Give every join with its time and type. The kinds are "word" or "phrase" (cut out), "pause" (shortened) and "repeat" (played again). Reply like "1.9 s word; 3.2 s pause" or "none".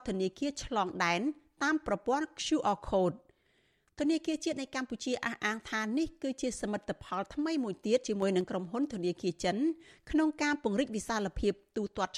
none